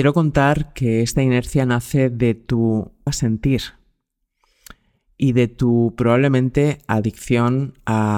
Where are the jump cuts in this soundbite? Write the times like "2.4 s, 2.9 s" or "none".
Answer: 3.1 s